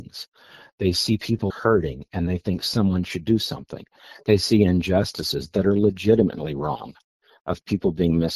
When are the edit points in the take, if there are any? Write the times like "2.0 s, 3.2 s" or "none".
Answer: 1.5 s